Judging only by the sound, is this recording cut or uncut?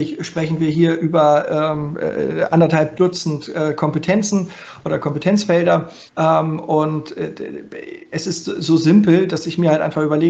cut